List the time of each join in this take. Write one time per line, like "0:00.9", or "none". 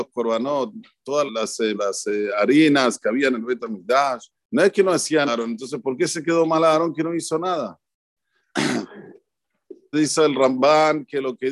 0:01.3
0:01.7
0:04.3
0:05.3
0:09.9